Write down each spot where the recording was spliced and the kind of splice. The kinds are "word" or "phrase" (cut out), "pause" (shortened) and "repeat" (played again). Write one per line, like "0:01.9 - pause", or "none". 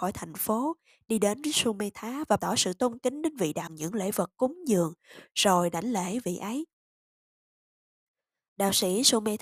0:02.4 - word
0:03.7 - phrase